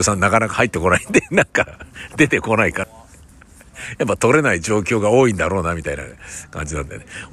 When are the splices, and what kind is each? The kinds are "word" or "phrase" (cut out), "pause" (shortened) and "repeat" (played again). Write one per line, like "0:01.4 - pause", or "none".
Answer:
0:02.8 - phrase